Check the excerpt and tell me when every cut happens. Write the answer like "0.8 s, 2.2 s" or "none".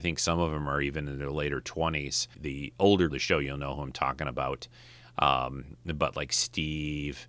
2.3 s, 3.1 s